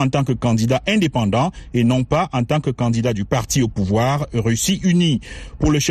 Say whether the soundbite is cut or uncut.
uncut